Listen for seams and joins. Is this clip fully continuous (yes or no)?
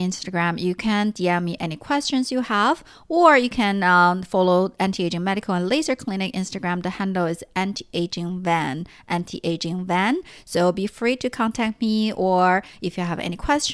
yes